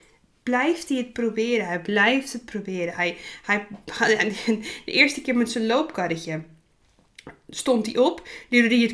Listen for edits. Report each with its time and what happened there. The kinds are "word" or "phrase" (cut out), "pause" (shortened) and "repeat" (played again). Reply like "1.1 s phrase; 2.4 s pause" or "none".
none